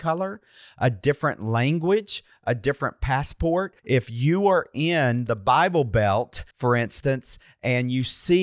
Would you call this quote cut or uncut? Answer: cut